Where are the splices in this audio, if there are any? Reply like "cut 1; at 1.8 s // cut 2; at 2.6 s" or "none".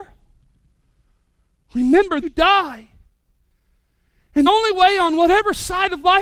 cut 1; at 2.2 s // cut 2; at 4.5 s